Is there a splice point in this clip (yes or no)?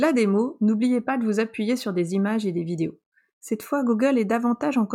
no